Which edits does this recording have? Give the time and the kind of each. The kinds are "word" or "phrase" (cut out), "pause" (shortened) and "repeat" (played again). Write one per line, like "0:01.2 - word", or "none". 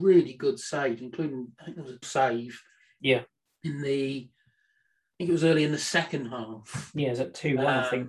0:02.0 - word